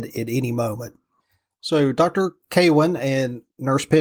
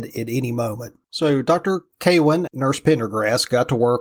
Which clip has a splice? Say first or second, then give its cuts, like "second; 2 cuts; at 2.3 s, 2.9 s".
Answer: second; 2 cuts; at 1.0 s, 2.5 s